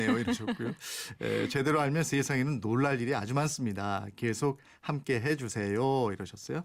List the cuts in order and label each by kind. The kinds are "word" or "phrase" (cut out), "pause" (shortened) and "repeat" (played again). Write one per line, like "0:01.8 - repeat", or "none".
none